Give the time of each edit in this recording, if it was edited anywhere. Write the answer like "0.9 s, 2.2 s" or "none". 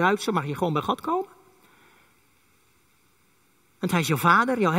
none